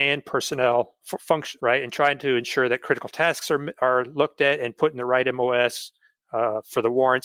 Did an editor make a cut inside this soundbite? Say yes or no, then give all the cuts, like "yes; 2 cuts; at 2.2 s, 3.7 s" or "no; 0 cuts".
yes; 2 cuts; at 1.0 s, 1.6 s